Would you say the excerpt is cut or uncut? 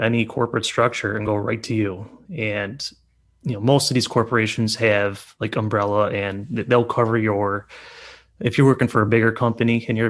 uncut